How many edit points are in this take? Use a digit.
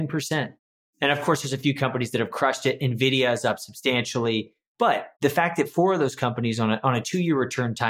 1